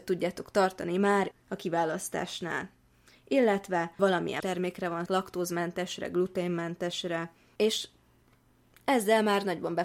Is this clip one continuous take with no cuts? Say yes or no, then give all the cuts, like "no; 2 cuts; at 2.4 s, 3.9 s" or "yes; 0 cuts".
no; 4 cuts; at 1.3 s, 4.0 s, 4.4 s, 5.1 s